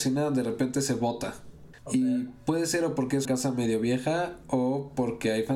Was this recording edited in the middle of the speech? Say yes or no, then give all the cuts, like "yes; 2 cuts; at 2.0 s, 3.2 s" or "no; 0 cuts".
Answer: yes; 2 cuts; at 1.8 s, 3.2 s